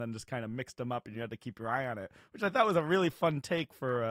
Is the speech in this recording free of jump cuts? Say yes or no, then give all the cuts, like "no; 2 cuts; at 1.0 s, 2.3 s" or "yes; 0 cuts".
yes; 0 cuts